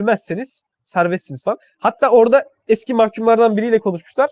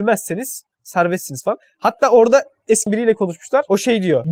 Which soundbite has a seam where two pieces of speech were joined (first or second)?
second